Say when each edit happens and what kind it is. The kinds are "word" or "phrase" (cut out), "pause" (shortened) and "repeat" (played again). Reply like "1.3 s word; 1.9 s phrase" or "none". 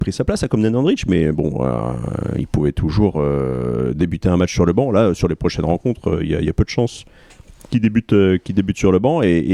none